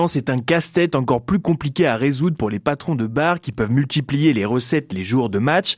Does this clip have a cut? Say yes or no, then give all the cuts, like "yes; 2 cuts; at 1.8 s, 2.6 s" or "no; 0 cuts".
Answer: no; 0 cuts